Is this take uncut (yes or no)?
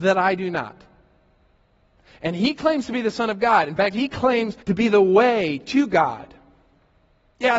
no